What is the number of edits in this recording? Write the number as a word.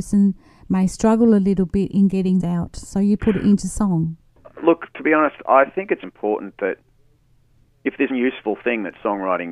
three